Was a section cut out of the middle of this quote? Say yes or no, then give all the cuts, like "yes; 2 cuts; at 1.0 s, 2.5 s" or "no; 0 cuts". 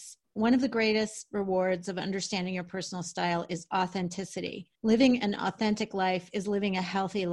yes; 1 cut; at 4.7 s